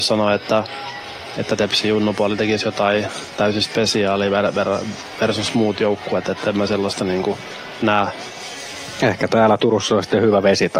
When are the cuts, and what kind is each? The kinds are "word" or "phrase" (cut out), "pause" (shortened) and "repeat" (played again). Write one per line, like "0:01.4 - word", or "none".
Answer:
none